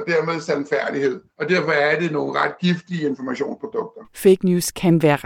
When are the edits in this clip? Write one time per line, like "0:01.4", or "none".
0:01.3
0:04.1